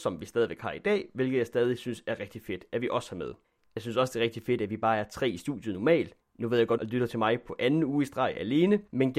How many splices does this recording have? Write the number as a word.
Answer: one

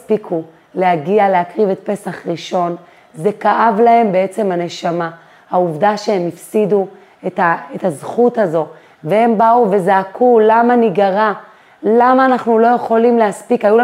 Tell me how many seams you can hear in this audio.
zero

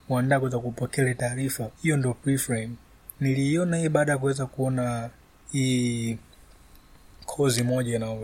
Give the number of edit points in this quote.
three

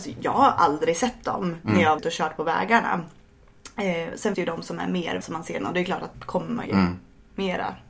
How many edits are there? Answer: six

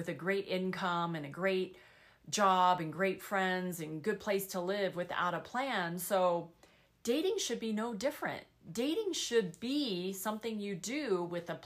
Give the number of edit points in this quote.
zero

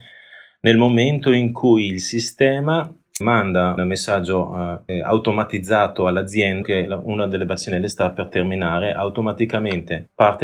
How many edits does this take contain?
four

